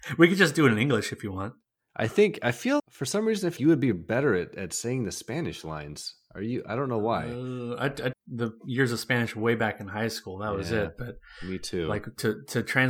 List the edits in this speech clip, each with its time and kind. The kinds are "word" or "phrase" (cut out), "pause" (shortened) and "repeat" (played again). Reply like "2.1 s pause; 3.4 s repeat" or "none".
2.8 s word; 3.6 s word; 8.1 s word

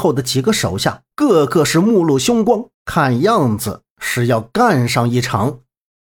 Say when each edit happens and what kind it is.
1.1 s pause; 2.7 s pause

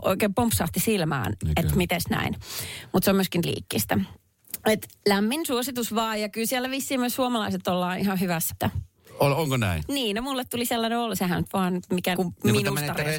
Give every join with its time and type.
3.4 s word; 8.5 s word; 12.2 s word

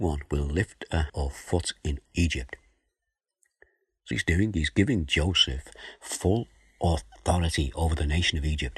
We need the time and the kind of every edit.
1.1 s word; 2.1 s word; 4.1 s word

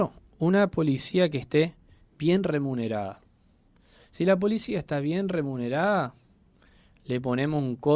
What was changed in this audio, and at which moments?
none

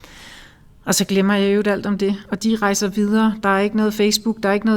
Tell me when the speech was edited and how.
none

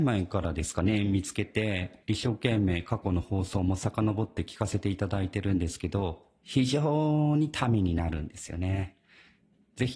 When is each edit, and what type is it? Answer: 2.0 s pause

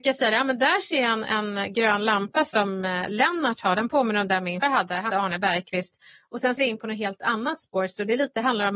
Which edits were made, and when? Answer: 4.6 s word; 5.1 s word; 6.6 s word

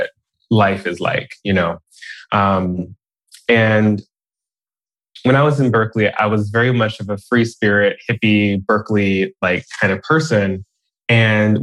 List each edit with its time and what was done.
none

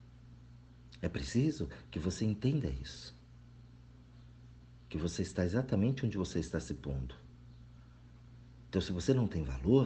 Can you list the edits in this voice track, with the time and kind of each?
none

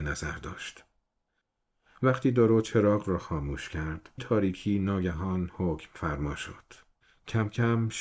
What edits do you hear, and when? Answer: 4.2 s word

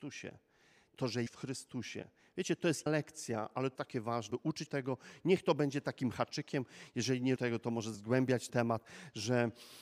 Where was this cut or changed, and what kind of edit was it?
1.3 s word; 2.9 s word; 3.8 s word; 4.3 s word; 4.7 s word; 7.4 s word; 7.9 s word; 8.5 s word

